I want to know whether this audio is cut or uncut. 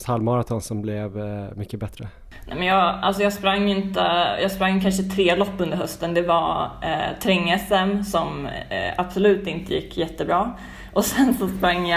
uncut